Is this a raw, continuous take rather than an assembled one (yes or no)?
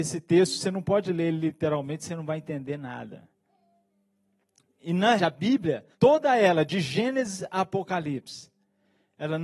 no